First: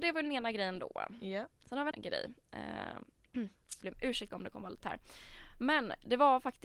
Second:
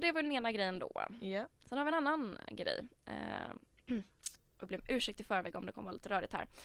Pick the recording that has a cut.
first; 4 cuts; at 1.9 s, 3.8 s, 4.3 s, 4.8 s

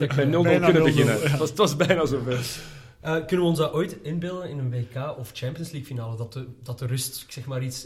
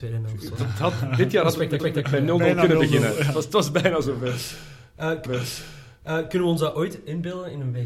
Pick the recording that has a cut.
second; 2 cuts; at 1.8 s, 5.3 s

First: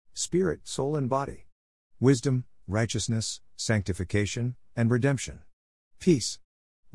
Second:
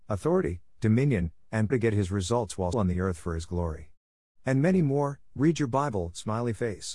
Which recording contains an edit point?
second; 2 cuts; at 1.7 s, 2.7 s

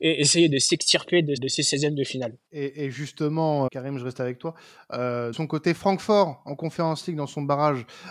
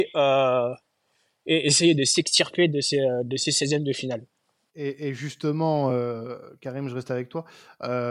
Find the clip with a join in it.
first; 4 cuts; at 1.4 s, 2.4 s, 3.7 s, 5.3 s

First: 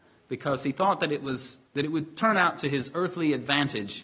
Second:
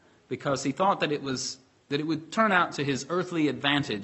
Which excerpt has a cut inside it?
first; 1 cut; at 1.7 s

